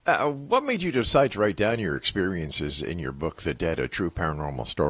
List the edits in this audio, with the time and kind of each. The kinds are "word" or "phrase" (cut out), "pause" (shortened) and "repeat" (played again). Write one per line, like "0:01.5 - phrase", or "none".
none